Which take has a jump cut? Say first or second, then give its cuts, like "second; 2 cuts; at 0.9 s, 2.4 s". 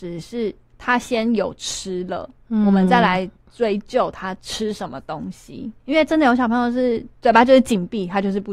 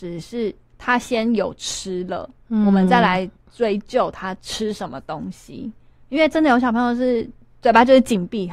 first; 2 cuts; at 5.8 s, 7.1 s